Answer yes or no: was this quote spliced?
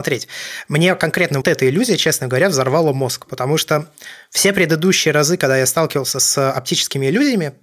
yes